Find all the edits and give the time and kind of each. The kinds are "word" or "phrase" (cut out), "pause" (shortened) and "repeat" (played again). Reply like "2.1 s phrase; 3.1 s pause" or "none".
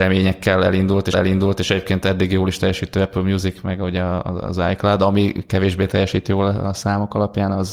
1.1 s repeat